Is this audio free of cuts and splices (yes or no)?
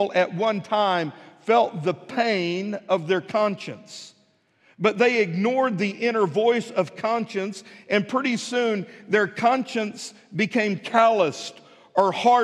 yes